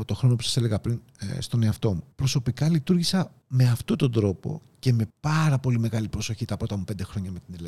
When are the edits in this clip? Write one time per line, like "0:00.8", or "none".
0:02.1
0:03.4
0:05.1

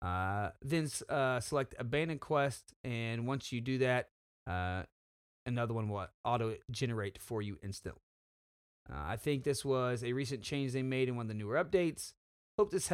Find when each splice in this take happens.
none

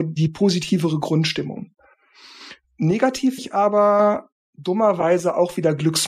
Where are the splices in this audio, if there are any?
0:03.4
0:04.4

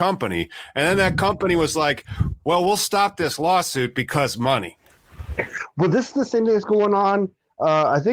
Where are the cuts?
none

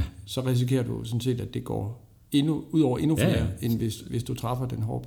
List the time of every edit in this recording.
none

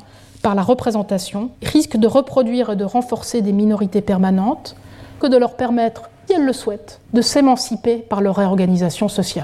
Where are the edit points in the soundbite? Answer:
0:01.5
0:05.2
0:06.3
0:07.0

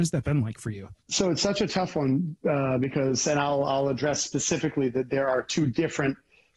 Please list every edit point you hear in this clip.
0:01.0

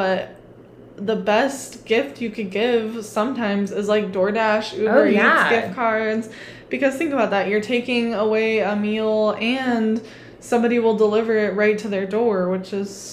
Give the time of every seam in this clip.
none

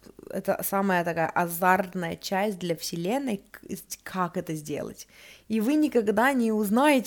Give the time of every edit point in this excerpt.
none

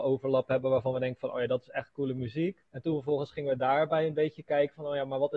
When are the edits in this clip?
0:02.7

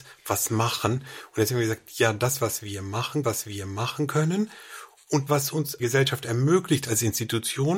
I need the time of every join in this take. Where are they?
0:03.2
0:05.3
0:05.8

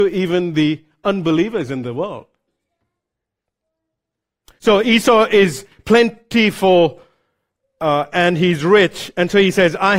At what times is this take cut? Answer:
none

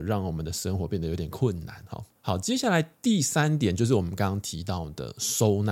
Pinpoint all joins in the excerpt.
none

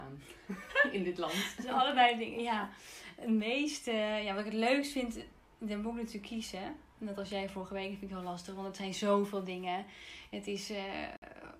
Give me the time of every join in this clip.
none

